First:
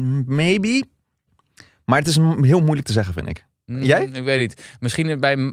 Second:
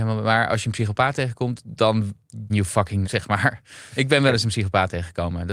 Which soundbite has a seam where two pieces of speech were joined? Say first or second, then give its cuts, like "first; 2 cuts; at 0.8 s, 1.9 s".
second; 2 cuts; at 2.5 s, 3.0 s